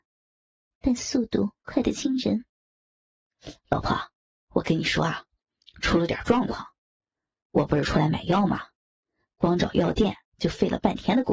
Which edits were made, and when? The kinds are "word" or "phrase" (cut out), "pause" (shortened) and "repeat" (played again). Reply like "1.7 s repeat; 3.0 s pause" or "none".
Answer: none